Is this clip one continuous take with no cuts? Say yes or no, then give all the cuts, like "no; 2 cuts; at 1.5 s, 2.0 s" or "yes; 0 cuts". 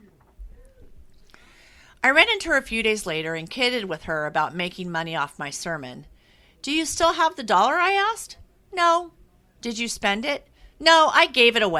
yes; 0 cuts